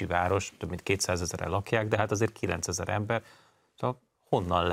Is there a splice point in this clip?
no; 0 cuts

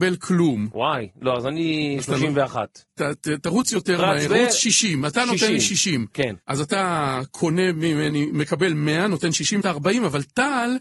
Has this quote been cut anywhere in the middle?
yes; 3 cuts; at 4.3 s, 6.4 s, 9.6 s

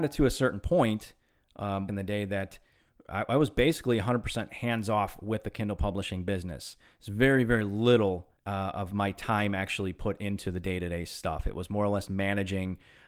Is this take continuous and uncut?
no; 3 cuts; at 1.9 s, 8.4 s, 12.1 s

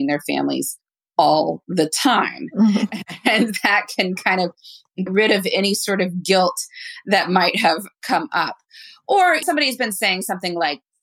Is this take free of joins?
no; 2 cuts; at 5.1 s, 9.4 s

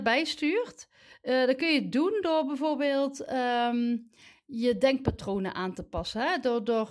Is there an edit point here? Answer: no; 0 cuts

